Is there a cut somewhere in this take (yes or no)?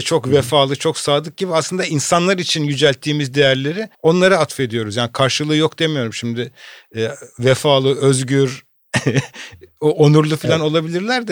yes